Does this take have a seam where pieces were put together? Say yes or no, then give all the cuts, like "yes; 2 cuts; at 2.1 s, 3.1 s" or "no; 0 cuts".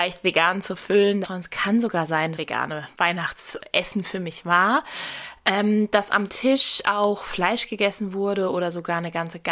yes; 3 cuts; at 1.2 s, 2.4 s, 6.3 s